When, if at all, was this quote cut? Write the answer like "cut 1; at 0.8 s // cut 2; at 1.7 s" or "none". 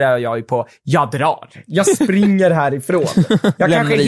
none